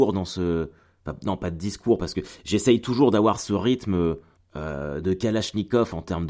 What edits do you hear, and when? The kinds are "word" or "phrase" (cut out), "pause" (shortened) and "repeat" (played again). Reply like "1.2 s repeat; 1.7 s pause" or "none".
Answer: 4.4 s pause